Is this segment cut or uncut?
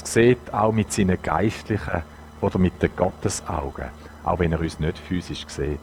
uncut